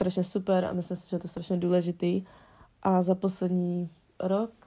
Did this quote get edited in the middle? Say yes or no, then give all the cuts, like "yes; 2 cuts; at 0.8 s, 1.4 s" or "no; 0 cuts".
no; 0 cuts